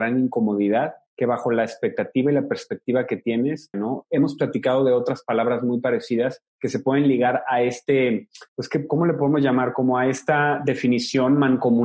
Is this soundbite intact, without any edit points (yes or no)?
no